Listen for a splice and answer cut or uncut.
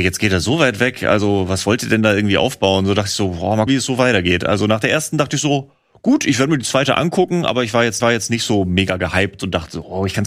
cut